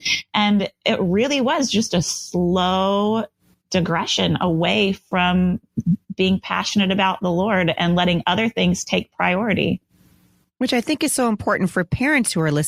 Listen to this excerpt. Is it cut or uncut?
uncut